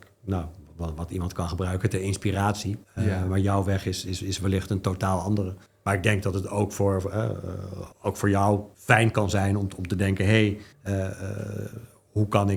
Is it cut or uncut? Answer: cut